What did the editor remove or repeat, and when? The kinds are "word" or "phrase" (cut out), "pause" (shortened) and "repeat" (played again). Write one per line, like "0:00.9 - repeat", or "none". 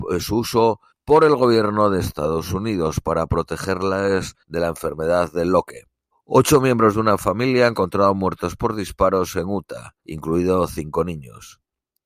0:00.9 - pause
0:04.4 - pause
0:06.1 - pause
0:10.0 - pause

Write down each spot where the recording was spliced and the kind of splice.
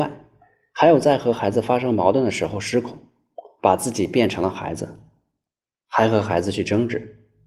none

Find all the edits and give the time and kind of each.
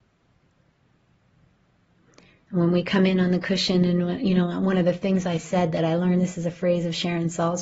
none

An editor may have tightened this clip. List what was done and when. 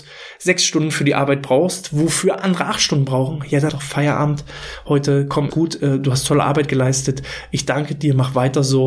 0:03.7 - word
0:05.5 - word

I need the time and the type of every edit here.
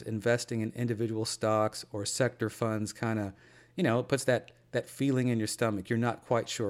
none

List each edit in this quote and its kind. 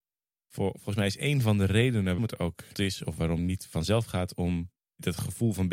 0:02.2 - word
0:02.7 - word
0:03.4 - word

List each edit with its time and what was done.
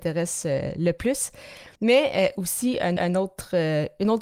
0:01.8 - pause
0:03.0 - repeat

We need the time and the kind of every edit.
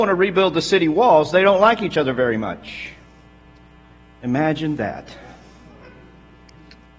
none

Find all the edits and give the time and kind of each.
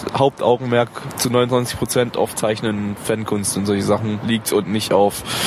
0:02.4 - word

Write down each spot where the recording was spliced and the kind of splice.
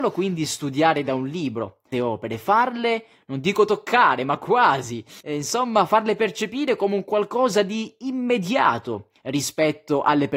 0:01.9 - phrase
0:05.2 - pause

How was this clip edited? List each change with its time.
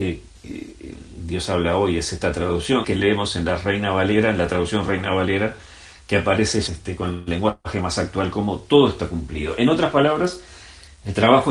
0:02.8 - phrase
0:06.7 - phrase

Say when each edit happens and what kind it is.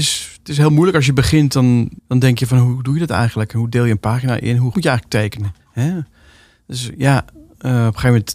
0:02.0 - pause
0:04.7 - word
0:05.6 - pause

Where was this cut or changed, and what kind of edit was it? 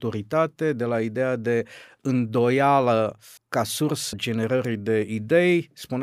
0:03.4 - word
0:04.1 - word

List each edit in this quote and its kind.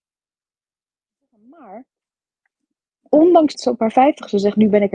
0:03.5 - word

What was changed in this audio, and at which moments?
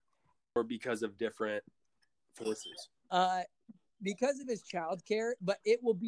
none

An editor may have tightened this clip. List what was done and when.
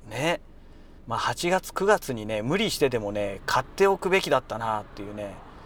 0:01.0 - pause

